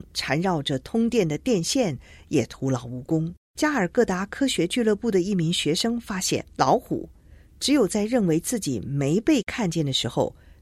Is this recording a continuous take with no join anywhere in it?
no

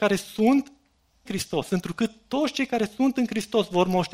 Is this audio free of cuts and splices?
no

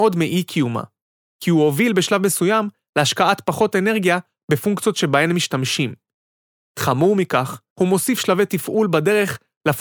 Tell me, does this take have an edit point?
yes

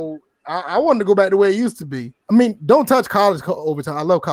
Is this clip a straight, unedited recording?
no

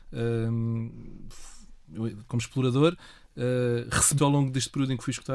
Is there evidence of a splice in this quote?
yes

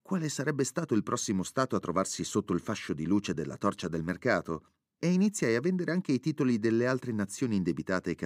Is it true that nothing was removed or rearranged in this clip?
yes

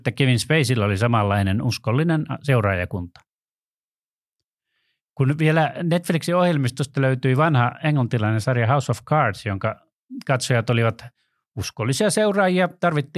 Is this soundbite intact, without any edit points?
yes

